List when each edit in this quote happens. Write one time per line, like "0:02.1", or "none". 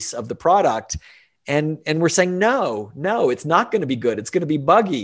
none